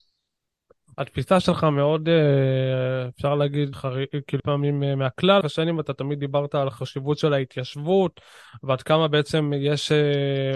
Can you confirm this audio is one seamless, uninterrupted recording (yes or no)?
no